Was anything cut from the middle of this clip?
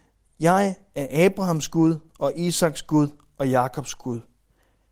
no; 0 cuts

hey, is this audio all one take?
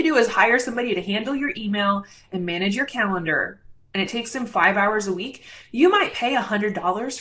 yes; 0 cuts

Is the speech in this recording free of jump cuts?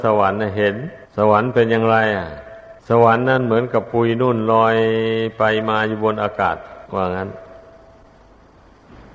no; 3 cuts; at 1.0 s, 2.8 s, 6.9 s

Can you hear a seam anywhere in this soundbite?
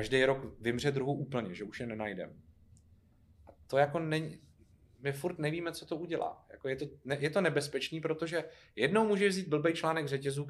no; 0 cuts

